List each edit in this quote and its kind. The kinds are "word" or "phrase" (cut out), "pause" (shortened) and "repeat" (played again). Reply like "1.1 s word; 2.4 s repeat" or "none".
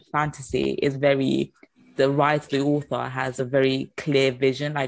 none